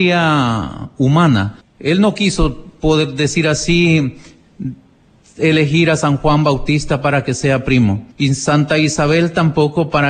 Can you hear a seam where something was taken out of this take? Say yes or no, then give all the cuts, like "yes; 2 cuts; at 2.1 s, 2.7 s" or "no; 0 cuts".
yes; 2 cuts; at 1.6 s, 8.1 s